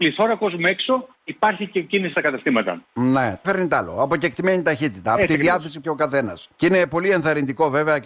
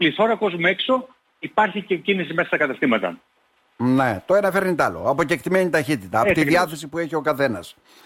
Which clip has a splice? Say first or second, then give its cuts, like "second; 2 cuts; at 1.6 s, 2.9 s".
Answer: first; 6 cuts; at 1.1 s, 2.1 s, 2.8 s, 3.4 s, 5.8 s, 6.5 s